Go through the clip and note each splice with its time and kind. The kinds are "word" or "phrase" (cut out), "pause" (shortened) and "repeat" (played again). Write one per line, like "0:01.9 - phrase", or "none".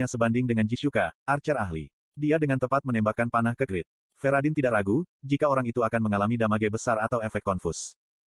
0:03.7 - word